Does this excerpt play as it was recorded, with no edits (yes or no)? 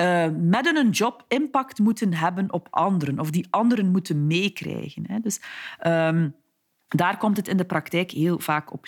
yes